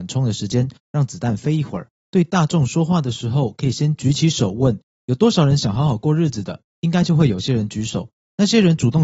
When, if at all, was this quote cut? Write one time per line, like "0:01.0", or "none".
0:02.0